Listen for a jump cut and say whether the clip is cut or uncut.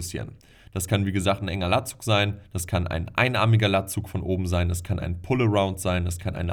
uncut